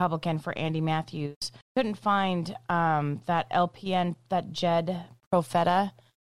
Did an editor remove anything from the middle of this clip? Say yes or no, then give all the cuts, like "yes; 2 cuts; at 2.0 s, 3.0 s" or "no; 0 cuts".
yes; 1 cut; at 1.6 s